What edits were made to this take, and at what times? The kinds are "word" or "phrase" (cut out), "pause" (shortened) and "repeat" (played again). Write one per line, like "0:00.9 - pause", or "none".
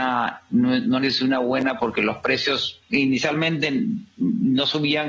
0:01.0 - word
0:01.8 - word
0:02.8 - word